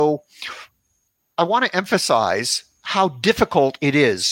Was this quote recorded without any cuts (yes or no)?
yes